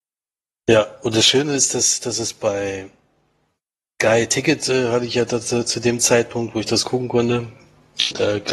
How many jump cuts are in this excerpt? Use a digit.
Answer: 0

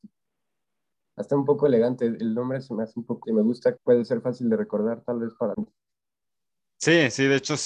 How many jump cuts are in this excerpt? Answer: 3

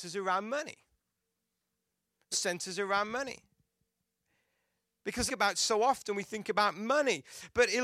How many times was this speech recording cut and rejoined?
2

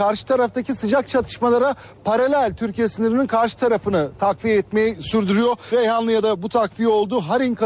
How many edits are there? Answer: 0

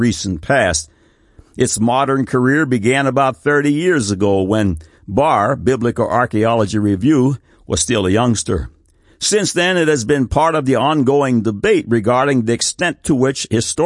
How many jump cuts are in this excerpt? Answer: 0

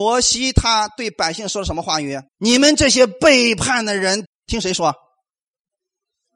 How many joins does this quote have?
2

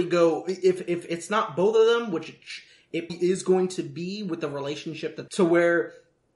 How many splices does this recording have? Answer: 2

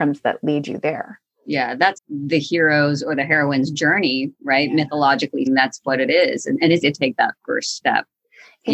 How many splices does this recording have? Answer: 3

